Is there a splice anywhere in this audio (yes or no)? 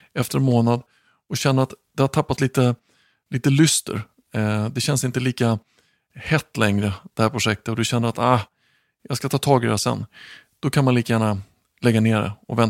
no